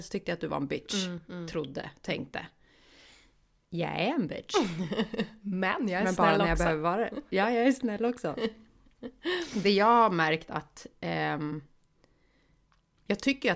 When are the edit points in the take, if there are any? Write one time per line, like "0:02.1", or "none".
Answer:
none